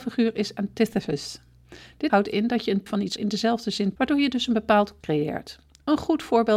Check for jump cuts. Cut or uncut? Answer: cut